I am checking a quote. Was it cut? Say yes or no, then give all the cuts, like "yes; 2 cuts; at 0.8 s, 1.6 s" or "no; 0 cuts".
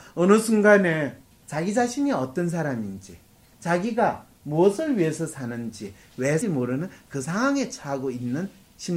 yes; 1 cut; at 6.4 s